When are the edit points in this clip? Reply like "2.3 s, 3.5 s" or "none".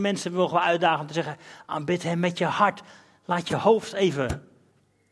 none